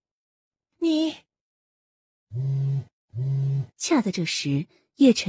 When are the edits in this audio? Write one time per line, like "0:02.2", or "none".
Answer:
0:03.7